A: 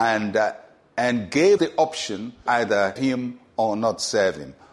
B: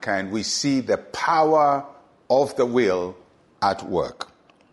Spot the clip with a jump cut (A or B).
A